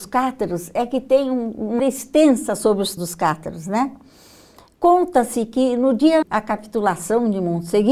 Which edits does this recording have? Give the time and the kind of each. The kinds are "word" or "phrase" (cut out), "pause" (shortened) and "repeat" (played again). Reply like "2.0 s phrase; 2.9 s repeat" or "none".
1.8 s word; 3.0 s word; 6.2 s word